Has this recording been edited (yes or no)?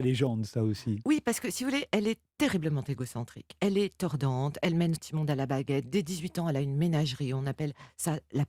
yes